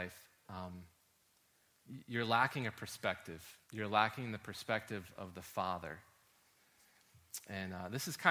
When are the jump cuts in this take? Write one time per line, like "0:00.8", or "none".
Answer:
0:03.6